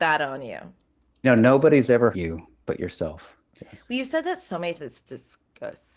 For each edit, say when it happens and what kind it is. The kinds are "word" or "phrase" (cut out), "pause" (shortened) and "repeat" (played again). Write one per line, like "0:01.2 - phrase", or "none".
0:01.2 - word
0:02.1 - word
0:04.7 - word